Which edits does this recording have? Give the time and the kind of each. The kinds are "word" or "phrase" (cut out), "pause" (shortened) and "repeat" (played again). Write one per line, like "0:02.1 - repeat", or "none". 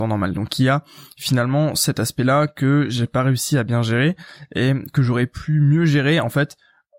none